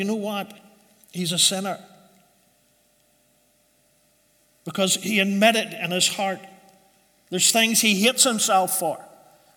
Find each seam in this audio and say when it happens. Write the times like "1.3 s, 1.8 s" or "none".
none